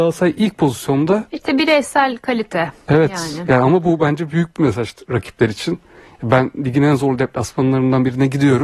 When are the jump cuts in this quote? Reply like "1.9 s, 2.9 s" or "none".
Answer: 1.3 s